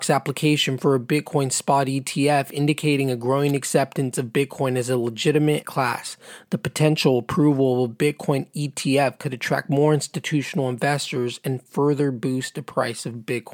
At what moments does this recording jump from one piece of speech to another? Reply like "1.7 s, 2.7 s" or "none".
5.6 s